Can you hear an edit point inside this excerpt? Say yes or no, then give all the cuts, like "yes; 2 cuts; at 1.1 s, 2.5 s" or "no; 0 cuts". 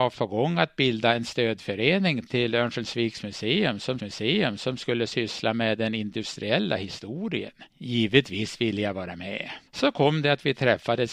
yes; 3 cuts; at 4.0 s, 7.7 s, 9.7 s